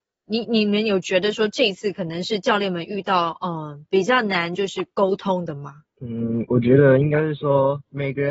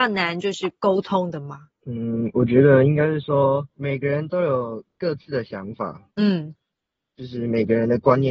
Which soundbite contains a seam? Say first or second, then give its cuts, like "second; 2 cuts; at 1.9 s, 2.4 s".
second; 1 cut; at 6.1 s